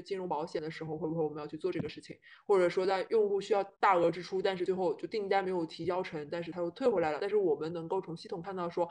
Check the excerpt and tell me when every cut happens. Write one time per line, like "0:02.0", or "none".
0:03.7